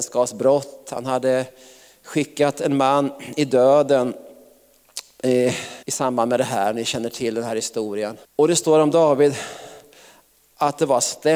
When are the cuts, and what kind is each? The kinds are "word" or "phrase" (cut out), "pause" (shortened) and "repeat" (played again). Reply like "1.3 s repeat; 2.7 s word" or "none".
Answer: 5.8 s pause; 8.2 s pause